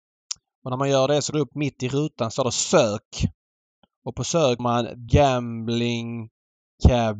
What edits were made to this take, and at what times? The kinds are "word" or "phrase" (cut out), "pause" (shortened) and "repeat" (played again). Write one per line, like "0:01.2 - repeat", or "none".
0:01.3 - word
0:04.6 - word
0:05.1 - word